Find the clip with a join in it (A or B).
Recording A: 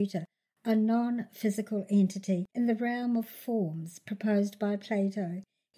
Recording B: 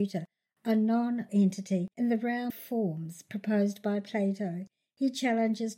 B